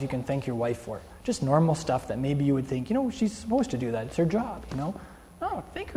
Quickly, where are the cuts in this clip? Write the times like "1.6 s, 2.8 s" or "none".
none